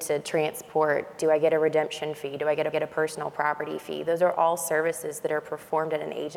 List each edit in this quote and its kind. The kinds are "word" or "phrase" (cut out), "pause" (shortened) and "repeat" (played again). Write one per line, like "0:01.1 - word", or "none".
0:02.7 - repeat